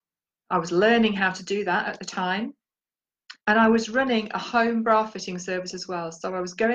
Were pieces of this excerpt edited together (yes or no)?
yes